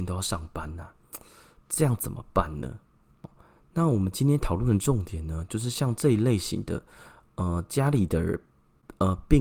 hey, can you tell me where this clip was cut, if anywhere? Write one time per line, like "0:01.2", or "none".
none